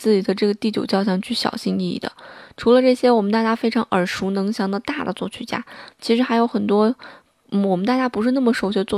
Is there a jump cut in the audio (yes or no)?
no